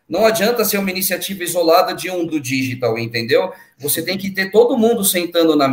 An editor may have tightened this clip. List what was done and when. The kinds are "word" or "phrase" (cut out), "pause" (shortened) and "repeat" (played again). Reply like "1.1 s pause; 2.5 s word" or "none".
2.3 s word

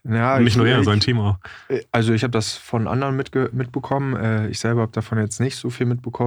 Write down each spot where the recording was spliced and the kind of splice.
3.5 s word

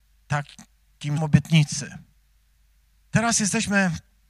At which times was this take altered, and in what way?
1.2 s word; 2.5 s pause

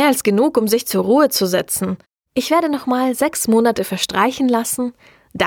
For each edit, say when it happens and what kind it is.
none

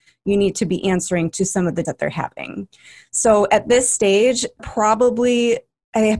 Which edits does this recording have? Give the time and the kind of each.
1.9 s word; 4.6 s word

